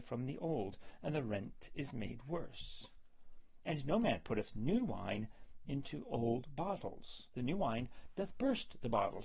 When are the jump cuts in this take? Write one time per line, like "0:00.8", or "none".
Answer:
0:07.3